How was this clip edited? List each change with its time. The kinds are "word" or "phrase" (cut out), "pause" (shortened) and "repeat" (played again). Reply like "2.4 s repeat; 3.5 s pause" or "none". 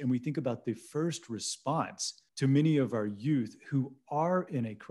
2.3 s pause